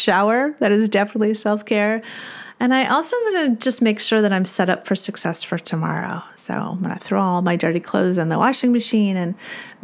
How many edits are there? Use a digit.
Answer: 0